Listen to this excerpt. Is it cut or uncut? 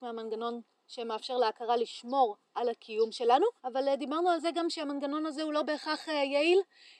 cut